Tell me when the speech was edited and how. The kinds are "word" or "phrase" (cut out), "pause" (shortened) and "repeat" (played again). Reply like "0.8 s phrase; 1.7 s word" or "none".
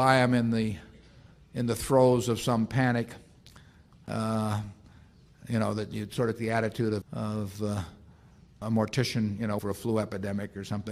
6.4 s word; 7.0 s word; 8.6 s word; 9.6 s word